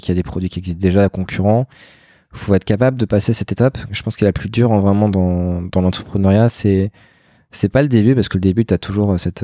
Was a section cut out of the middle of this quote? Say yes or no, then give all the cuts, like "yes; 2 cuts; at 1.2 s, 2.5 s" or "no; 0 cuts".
no; 0 cuts